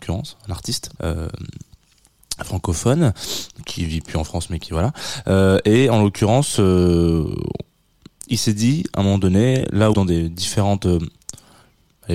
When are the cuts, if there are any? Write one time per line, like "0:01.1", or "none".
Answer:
0:01.0
0:09.9